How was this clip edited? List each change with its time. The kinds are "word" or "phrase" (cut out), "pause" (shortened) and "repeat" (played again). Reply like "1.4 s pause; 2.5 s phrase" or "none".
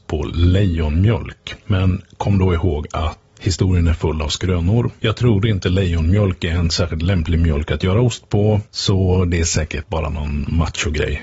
3.4 s word